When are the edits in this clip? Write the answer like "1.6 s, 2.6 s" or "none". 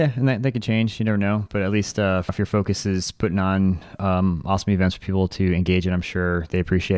2.3 s